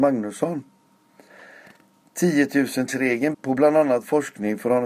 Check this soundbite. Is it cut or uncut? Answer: cut